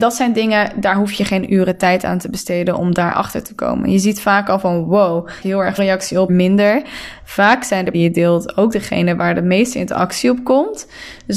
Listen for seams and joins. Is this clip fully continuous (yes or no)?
no